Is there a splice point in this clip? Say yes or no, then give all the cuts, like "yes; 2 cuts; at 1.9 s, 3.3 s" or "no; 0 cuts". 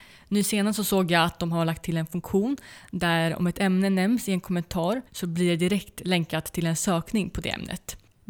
yes; 1 cut; at 5.1 s